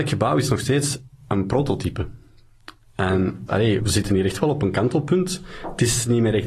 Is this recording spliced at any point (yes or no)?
yes